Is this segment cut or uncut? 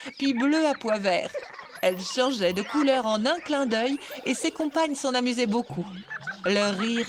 uncut